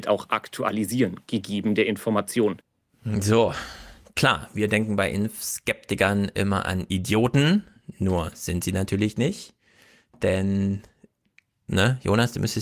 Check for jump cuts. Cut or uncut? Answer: uncut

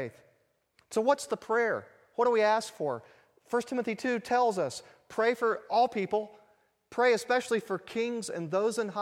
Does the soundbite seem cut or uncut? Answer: uncut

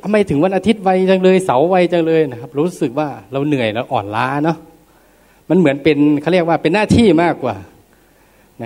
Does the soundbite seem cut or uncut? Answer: uncut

